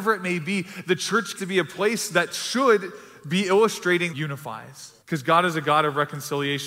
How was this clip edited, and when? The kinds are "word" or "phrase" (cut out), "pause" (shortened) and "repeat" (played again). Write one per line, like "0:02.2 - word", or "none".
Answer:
0:01.4 - word
0:04.1 - phrase
0:05.0 - pause